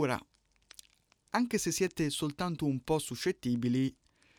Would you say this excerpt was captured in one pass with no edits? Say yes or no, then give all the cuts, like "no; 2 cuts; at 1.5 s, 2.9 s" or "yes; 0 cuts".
yes; 0 cuts